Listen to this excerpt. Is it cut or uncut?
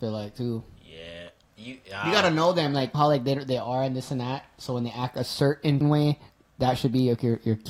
cut